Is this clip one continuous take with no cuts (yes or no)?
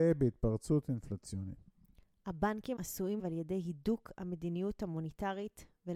no